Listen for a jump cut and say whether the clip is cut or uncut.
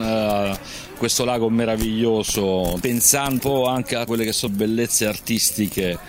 cut